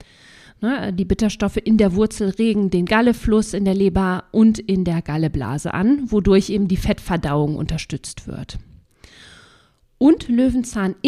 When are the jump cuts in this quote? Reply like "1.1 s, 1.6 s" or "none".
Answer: none